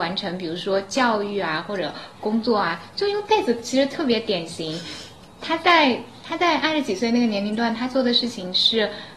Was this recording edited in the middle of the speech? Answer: no; 0 cuts

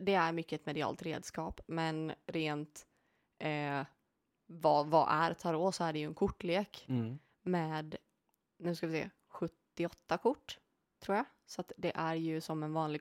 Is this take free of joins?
yes; 0 cuts

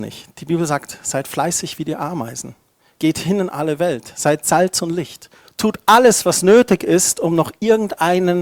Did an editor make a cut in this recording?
no; 0 cuts

